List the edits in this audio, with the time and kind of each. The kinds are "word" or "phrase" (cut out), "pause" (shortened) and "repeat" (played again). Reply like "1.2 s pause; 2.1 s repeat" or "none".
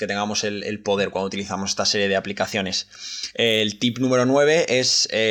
none